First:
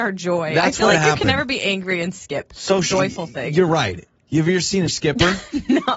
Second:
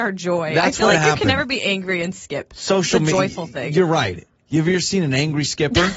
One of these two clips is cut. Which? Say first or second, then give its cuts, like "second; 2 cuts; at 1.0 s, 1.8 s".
first; 2 cuts; at 2.9 s, 4.9 s